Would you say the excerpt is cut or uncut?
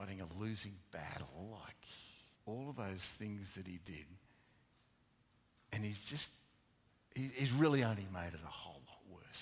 cut